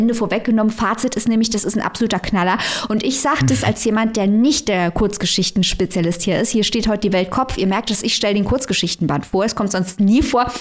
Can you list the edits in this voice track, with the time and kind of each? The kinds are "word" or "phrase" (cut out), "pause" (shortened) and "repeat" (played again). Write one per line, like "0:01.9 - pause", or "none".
none